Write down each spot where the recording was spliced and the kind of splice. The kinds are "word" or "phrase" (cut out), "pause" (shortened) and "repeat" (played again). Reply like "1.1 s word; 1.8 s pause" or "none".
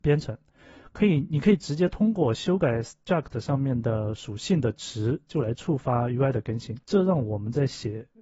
6.8 s pause